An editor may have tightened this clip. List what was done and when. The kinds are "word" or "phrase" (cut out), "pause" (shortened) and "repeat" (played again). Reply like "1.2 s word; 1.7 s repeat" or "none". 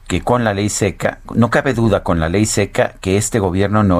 none